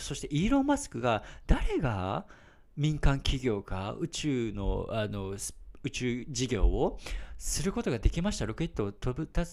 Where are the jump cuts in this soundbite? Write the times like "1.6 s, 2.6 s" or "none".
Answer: none

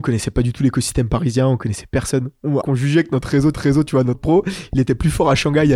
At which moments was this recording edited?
2.6 s, 3.5 s, 4.1 s

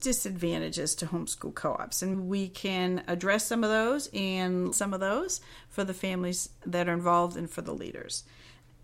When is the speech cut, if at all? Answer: 2.1 s, 4.7 s

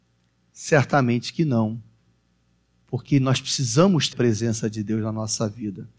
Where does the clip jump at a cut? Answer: 4.1 s

